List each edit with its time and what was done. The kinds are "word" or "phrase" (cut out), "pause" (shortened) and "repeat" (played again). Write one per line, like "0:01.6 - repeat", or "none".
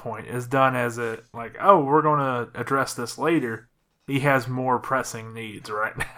none